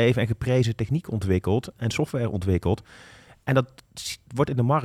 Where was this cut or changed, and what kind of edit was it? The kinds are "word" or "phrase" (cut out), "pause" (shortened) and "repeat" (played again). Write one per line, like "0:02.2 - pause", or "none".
none